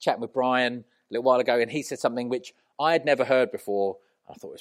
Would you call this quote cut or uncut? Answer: uncut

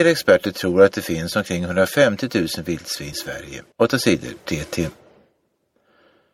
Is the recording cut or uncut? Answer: cut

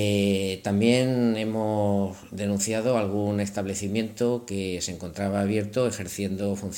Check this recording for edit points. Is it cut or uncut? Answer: uncut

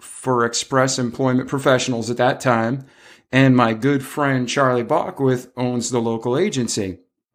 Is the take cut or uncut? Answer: uncut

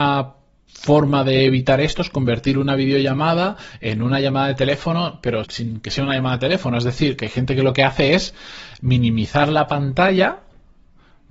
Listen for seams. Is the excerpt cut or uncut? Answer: cut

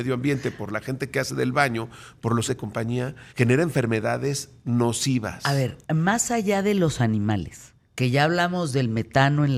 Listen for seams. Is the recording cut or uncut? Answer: cut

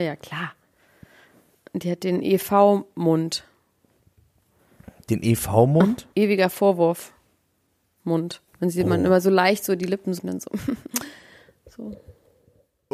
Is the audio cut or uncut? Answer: cut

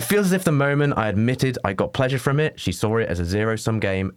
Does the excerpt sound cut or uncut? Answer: uncut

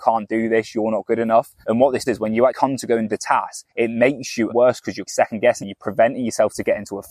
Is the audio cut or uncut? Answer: cut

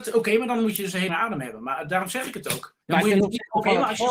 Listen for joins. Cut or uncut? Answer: cut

